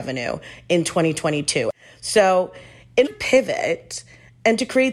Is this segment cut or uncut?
cut